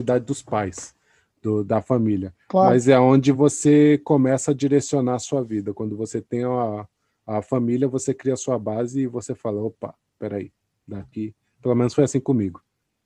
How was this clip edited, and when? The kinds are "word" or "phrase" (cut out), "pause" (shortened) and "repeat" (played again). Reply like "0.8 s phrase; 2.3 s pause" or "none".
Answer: none